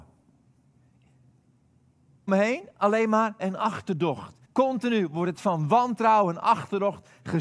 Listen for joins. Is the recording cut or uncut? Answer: cut